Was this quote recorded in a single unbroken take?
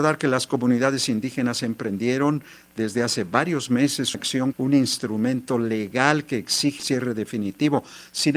no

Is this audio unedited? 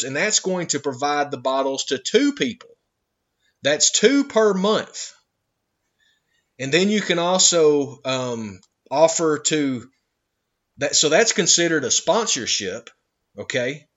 yes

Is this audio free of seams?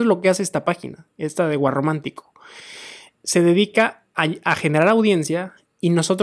yes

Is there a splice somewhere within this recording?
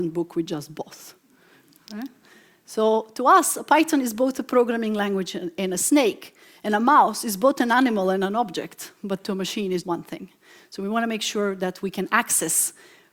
yes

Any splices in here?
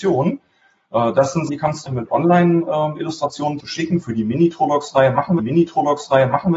yes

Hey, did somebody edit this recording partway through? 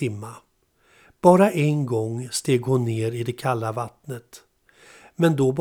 no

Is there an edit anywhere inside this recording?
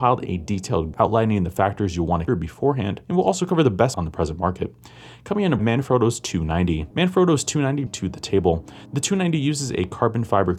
yes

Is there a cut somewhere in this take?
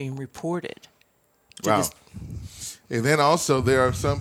no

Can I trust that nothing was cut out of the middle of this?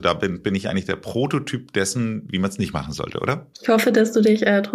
no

